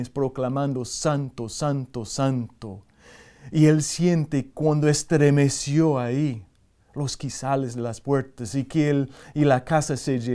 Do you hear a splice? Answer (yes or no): no